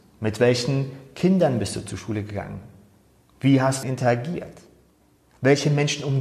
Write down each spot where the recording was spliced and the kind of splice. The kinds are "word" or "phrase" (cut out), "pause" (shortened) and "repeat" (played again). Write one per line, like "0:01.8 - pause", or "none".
0:03.8 - phrase